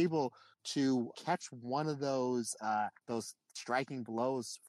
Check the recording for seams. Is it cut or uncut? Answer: cut